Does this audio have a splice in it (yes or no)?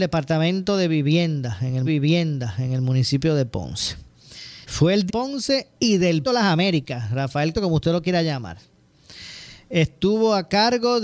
yes